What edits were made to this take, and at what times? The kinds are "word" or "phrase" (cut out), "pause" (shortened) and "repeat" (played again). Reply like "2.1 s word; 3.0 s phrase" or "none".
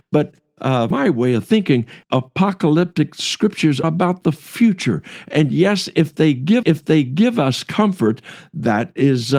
0.9 s word; 2.0 s word; 3.8 s word; 6.6 s repeat